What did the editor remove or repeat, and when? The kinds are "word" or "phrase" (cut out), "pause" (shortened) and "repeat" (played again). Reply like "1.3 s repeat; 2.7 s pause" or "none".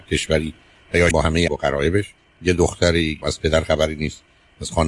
1.1 s phrase; 1.5 s word; 2.2 s pause; 3.2 s word